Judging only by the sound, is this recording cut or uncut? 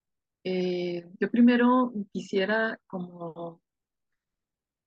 uncut